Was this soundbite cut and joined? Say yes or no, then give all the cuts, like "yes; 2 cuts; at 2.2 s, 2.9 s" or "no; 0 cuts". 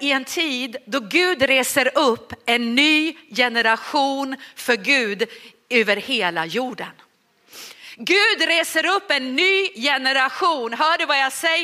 no; 0 cuts